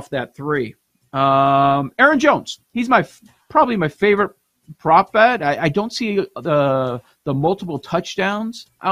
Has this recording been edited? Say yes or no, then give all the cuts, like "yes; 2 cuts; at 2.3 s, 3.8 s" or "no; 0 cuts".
no; 0 cuts